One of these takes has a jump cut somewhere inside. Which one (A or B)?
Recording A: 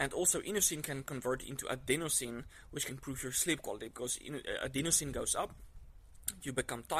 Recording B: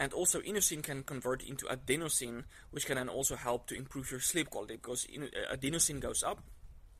A